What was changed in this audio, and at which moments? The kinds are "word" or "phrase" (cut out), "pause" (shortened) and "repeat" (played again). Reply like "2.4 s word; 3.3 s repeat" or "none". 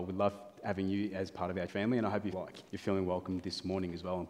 1.7 s word; 2.3 s word; 2.7 s pause